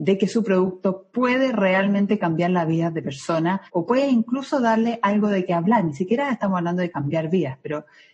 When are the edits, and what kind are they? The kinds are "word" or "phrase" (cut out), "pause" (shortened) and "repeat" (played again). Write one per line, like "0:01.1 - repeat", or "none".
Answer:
0:03.7 - pause